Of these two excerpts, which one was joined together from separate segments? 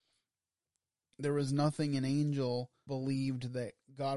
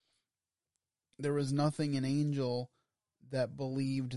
first; 1 cut; at 2.9 s

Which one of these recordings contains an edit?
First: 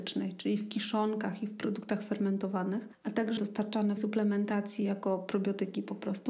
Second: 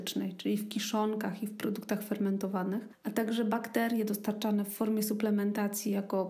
first; 2 cuts; at 3.4 s, 4.0 s

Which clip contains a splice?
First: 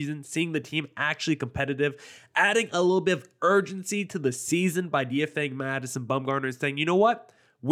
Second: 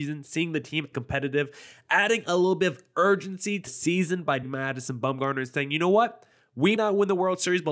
second; 4 cuts; at 0.9 s, 3.7 s, 4.4 s, 6.8 s

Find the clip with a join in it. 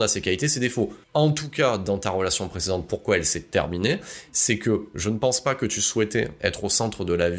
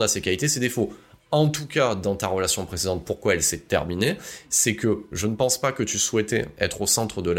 first; 1 cut; at 1.0 s

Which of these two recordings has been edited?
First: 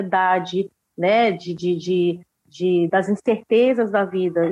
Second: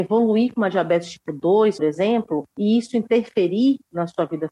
second; 2 cuts; at 1.8 s, 2.5 s

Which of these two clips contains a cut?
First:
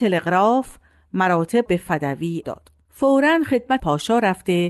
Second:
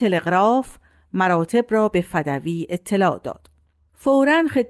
first; 4 cuts; at 1.7 s, 2.4 s, 2.8 s, 3.8 s

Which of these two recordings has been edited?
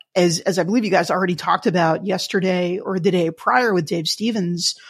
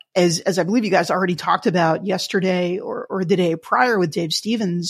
first; 1 cut; at 2.8 s

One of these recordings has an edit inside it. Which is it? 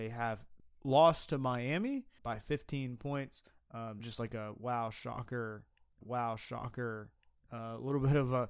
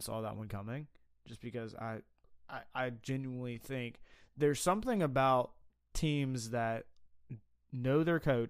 first; 3 cuts; at 2.2 s, 4.0 s, 6.0 s

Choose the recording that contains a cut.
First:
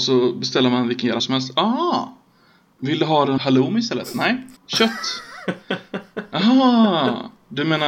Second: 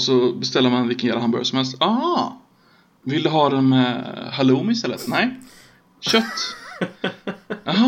first; 3 cuts; at 1.2 s, 3.4 s, 4.6 s

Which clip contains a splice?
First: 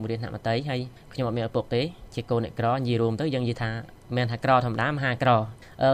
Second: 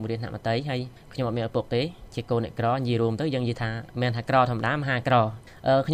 second; 1 cut; at 3.9 s

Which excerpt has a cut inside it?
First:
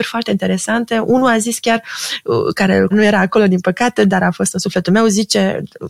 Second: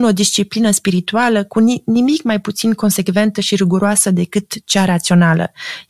first; 1 cut; at 2.9 s

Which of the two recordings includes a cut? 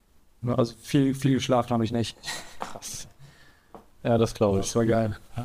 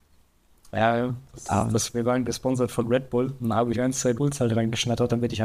second; 2 cuts; at 3.7 s, 4.2 s

